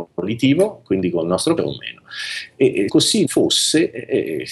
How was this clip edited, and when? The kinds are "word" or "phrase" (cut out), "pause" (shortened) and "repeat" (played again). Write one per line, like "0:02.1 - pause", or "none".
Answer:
0:01.6 - word
0:02.9 - word
0:03.2 - word